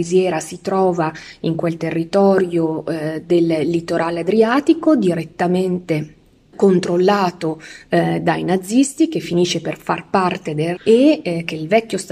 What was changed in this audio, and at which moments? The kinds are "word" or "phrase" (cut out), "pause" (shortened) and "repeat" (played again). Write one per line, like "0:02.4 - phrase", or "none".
0:06.5 - word
0:10.8 - word